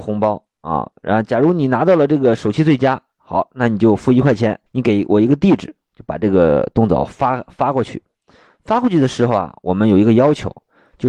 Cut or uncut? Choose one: cut